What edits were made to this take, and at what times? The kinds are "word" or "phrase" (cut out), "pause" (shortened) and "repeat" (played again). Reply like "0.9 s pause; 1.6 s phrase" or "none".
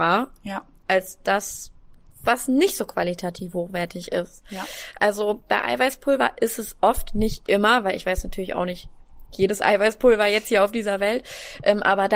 none